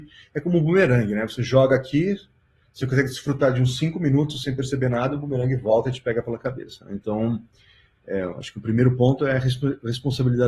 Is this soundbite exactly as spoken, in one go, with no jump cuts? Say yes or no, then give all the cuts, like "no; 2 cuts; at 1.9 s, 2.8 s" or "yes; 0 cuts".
yes; 0 cuts